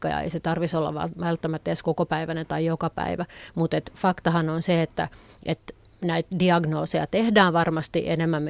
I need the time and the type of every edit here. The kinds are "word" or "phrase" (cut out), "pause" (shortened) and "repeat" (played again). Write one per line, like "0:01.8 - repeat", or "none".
none